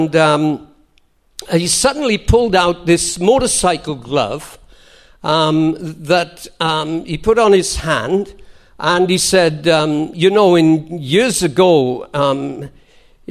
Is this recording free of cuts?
yes; 0 cuts

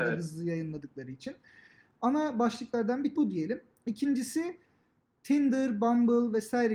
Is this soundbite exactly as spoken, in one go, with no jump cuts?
no; 1 cut; at 3.2 s

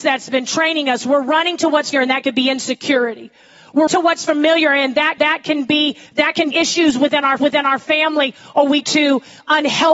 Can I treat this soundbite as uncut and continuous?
no; 7 cuts; at 1.9 s, 3.9 s, 5.2 s, 6.1 s, 6.5 s, 7.4 s, 8.8 s

